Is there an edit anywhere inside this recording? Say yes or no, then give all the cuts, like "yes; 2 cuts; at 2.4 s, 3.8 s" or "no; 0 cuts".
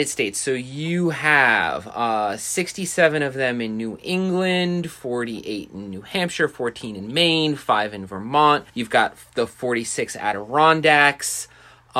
yes; 1 cut; at 8.7 s